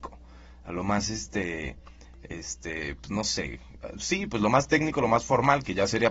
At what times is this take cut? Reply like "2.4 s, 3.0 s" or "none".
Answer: none